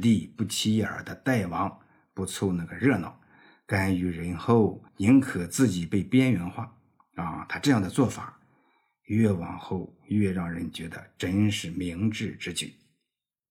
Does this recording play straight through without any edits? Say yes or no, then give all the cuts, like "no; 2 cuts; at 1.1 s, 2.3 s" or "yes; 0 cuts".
no; 1 cut; at 4.9 s